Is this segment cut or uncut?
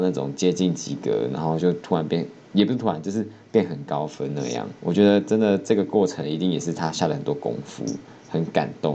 cut